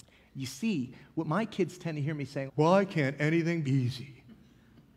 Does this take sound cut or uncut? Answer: cut